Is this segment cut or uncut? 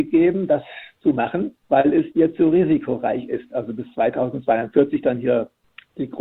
cut